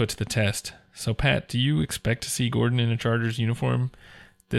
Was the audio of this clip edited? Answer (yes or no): no